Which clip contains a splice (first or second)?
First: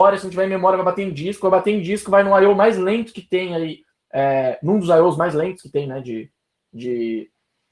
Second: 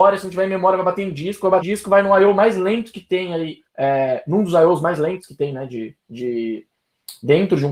second